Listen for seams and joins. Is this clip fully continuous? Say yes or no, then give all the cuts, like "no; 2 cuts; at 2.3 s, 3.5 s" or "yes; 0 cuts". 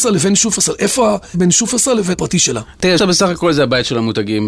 no; 3 cuts; at 1.3 s, 2.1 s, 3.0 s